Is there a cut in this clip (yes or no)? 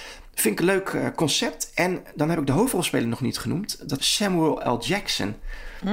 yes